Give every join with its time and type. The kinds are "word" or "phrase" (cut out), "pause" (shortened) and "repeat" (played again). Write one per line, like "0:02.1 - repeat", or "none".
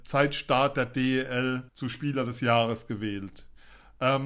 0:01.7 - pause